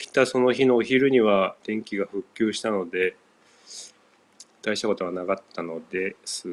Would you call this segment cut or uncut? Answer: cut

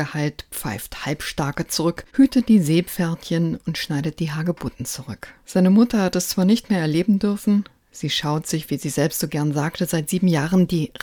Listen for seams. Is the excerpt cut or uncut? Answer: cut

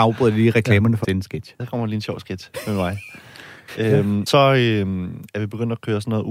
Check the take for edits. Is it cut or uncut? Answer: cut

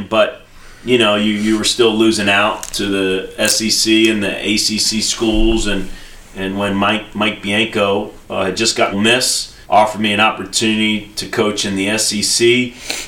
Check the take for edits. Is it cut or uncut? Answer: cut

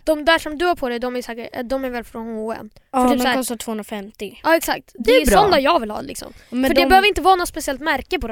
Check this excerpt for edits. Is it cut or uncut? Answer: uncut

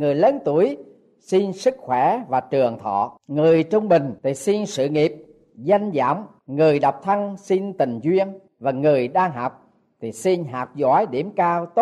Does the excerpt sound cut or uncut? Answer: cut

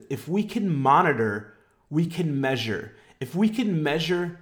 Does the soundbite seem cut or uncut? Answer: uncut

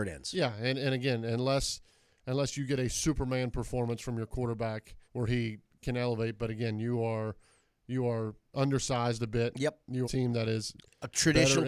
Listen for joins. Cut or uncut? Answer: cut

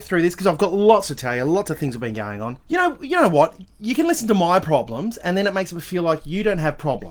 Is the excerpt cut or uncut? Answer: cut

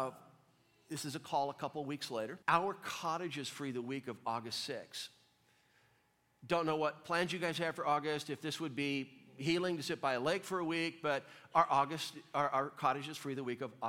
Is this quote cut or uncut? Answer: cut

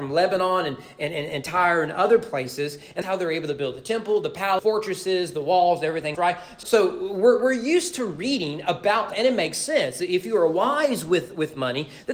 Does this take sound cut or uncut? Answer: cut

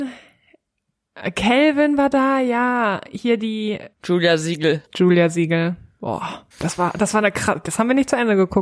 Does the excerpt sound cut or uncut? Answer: cut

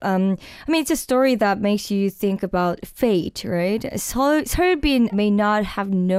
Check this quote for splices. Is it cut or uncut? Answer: cut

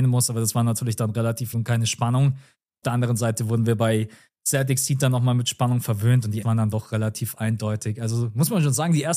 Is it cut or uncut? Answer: cut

